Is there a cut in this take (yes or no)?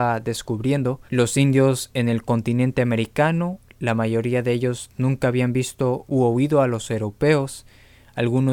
yes